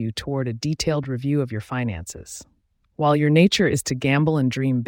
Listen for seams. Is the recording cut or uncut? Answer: uncut